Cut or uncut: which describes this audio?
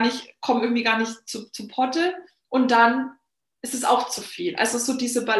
uncut